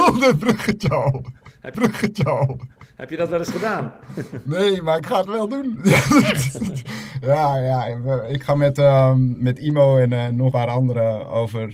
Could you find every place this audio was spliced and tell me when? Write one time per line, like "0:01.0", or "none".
0:01.7
0:10.5

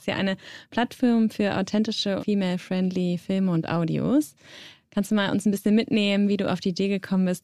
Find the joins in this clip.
0:02.2

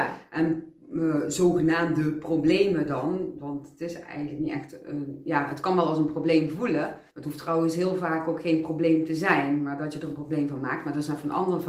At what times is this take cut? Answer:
0:07.1

